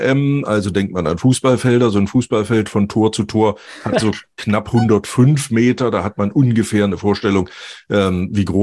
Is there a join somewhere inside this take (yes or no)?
no